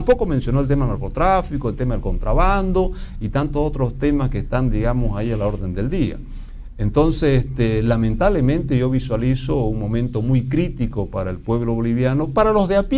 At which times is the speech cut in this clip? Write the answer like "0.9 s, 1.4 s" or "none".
none